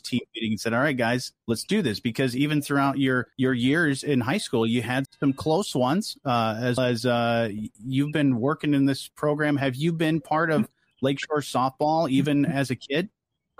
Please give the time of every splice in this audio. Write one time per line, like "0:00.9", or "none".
0:01.4
0:03.3
0:05.0
0:06.8

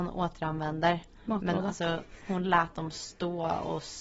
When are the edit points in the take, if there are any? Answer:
none

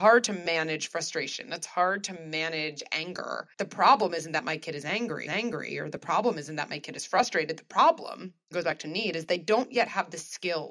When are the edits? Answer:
0:03.5
0:05.3
0:08.5

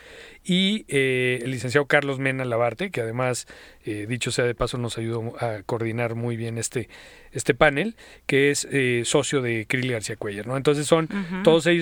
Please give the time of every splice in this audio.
none

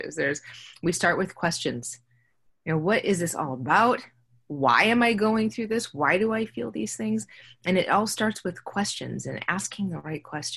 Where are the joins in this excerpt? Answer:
none

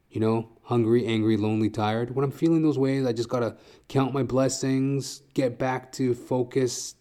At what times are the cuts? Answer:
none

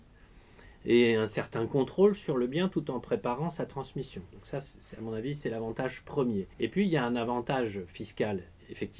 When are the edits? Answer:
0:06.5

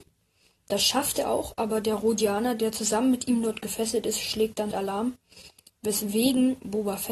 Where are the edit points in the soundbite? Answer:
0:04.7

